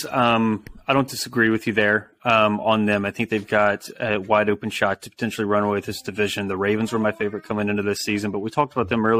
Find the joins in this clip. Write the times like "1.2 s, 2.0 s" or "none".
none